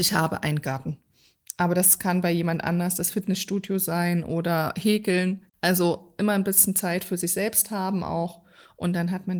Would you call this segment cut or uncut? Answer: cut